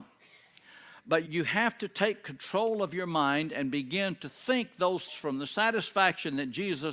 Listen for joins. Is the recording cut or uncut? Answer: cut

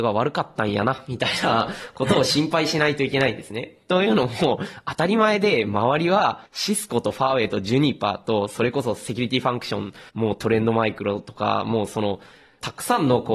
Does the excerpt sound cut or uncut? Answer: cut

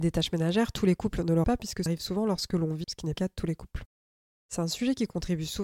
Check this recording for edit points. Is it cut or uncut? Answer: cut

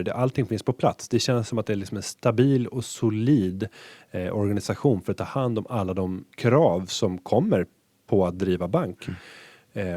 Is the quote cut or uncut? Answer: cut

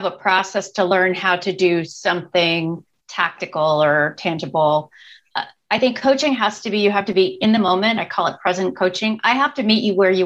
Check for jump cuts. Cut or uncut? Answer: uncut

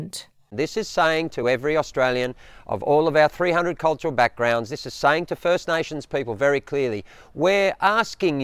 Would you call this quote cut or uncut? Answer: uncut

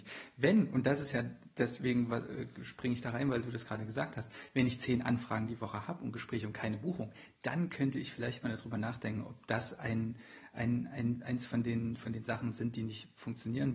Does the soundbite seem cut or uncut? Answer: uncut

